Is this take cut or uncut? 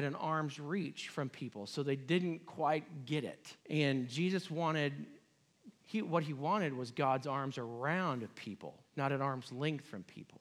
cut